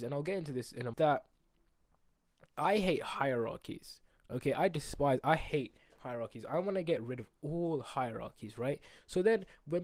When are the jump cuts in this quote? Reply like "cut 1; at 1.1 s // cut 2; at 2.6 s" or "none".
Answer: cut 1; at 0.9 s